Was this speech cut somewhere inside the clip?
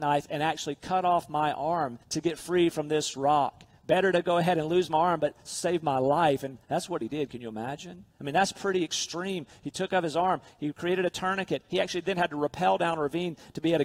yes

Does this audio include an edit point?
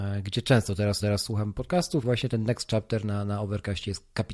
yes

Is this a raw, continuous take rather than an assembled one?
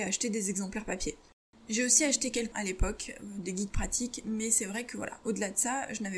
no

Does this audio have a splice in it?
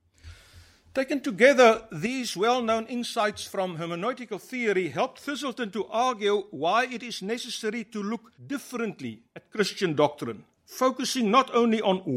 yes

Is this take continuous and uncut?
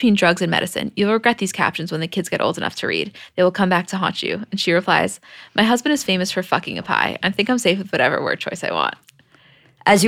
yes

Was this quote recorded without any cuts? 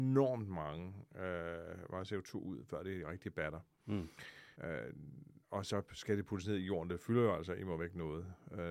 no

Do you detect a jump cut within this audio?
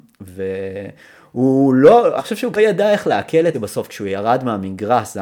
yes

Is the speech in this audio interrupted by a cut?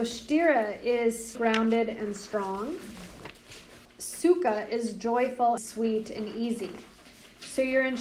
yes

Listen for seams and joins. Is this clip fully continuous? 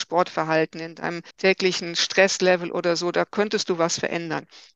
no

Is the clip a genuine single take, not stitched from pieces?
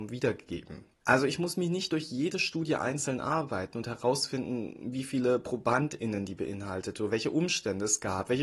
yes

